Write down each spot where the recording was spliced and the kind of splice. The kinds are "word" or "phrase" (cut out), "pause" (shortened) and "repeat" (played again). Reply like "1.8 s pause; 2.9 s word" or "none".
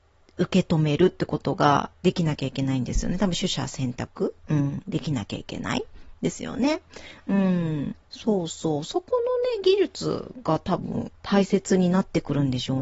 1.9 s pause; 4.4 s pause; 8.0 s pause; 11.2 s pause